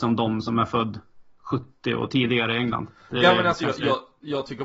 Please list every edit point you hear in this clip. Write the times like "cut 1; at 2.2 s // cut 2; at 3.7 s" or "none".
none